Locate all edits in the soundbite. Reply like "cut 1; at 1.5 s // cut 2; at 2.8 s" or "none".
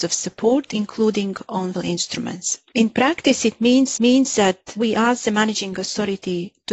cut 1; at 1.7 s // cut 2; at 4.0 s